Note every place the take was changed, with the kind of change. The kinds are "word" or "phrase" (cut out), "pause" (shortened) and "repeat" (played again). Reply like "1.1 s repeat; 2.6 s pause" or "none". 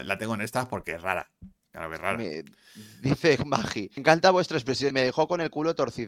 4.0 s word; 4.9 s phrase